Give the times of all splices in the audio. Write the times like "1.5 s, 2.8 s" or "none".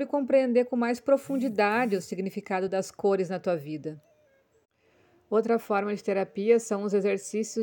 none